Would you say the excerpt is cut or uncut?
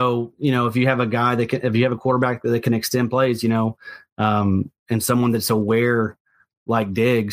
cut